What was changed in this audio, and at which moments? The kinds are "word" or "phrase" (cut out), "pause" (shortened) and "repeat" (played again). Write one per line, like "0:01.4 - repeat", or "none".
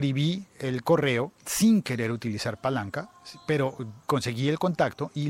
0:01.4 - pause
0:04.0 - pause